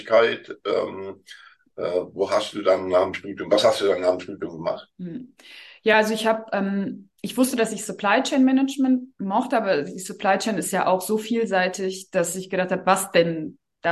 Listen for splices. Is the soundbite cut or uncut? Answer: uncut